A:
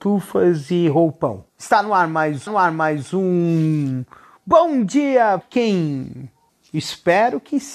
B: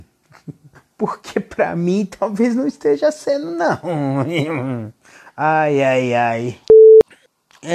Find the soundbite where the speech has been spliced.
A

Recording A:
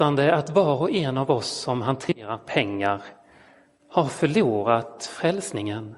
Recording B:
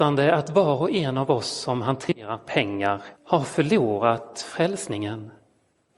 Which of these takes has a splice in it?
B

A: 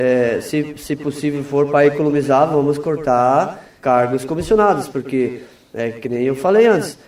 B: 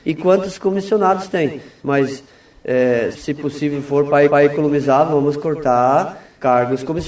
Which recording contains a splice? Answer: B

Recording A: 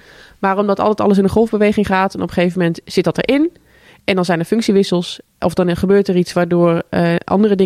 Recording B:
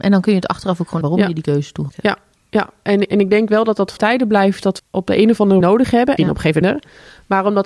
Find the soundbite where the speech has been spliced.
B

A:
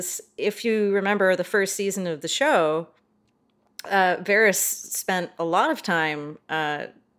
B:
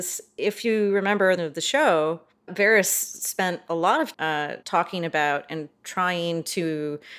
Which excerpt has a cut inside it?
B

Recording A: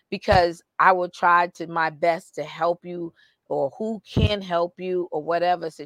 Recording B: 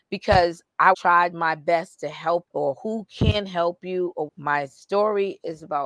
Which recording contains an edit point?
B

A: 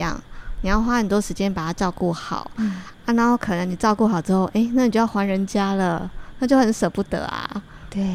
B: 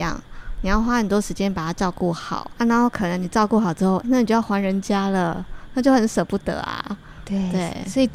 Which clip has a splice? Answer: B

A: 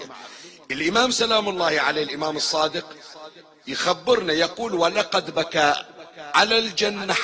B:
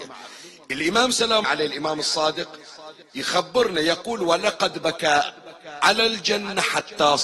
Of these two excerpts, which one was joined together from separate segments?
B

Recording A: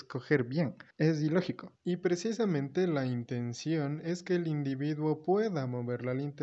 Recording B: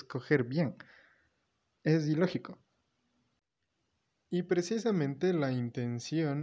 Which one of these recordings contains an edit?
A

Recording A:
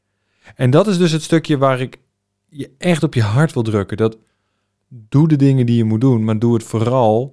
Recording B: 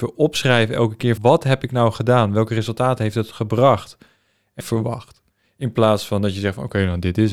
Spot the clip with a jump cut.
B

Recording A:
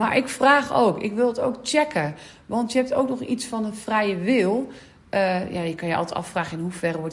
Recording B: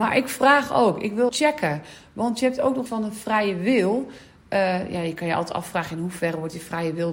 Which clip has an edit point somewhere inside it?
B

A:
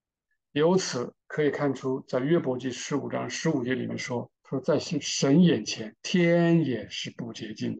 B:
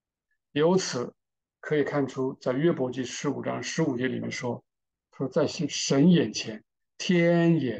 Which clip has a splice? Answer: A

